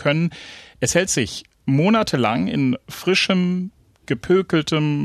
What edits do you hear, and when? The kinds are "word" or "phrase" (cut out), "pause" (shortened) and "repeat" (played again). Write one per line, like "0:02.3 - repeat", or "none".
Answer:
none